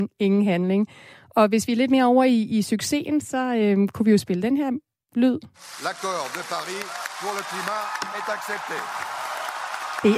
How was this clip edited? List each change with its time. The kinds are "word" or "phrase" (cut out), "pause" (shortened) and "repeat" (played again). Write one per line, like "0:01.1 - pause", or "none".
none